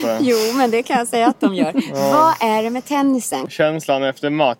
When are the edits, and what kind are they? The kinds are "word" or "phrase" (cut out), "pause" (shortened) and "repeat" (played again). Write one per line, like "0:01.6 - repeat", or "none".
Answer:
none